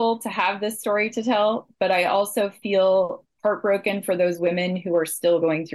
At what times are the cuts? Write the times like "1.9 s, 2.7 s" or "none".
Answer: none

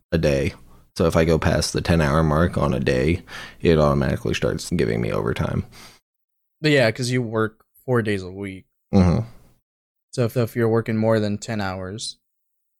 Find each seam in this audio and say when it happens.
4.7 s, 10.3 s

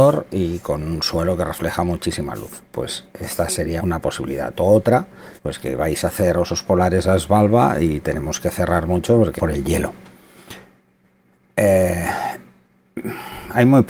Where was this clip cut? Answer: 3.8 s, 5.4 s, 9.4 s

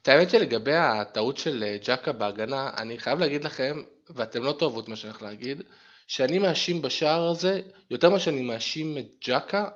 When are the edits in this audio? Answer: none

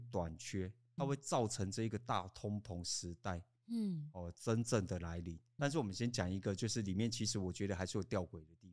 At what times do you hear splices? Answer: 1.0 s, 5.6 s

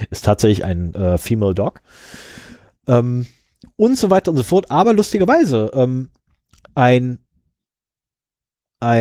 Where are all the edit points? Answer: none

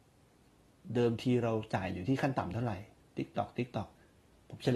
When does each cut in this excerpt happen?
3.0 s

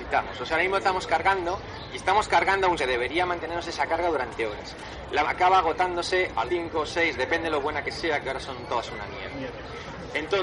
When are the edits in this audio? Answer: 2.8 s, 5.2 s, 6.5 s

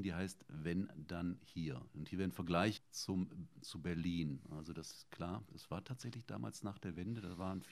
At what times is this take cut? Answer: 2.8 s

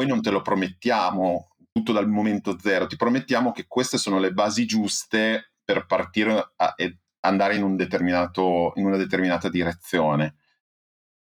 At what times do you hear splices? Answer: none

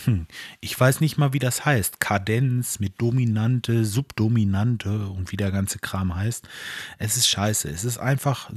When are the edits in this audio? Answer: none

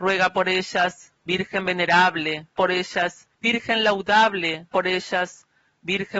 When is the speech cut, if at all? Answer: 1.1 s, 2.6 s, 3.3 s, 4.7 s

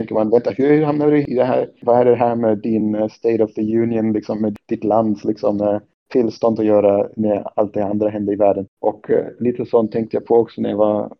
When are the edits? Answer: none

